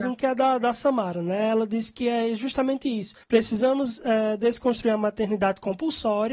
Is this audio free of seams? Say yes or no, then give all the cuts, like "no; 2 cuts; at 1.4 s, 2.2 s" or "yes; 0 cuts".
no; 1 cut; at 3.2 s